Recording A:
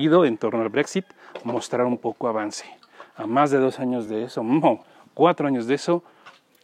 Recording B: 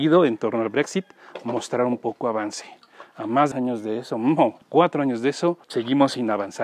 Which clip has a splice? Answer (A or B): B